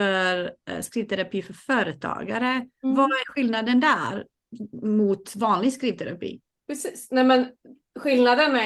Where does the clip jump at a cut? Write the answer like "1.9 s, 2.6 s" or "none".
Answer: 2.7 s, 6.5 s